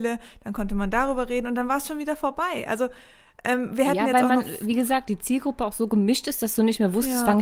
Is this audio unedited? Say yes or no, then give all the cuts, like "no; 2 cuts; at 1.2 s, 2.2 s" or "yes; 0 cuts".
yes; 0 cuts